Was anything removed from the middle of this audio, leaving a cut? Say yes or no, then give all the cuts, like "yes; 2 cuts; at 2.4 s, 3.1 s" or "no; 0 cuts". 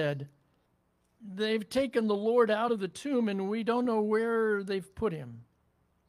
no; 0 cuts